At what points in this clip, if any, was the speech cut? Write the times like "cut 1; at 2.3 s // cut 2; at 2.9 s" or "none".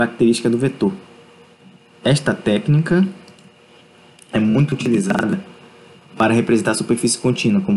none